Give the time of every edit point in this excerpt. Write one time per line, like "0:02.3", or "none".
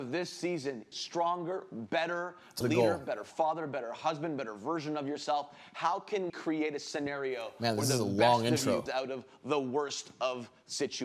0:00.9
0:02.6
0:06.3
0:08.9